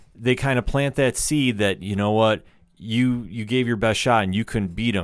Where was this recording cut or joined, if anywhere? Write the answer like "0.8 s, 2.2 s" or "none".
none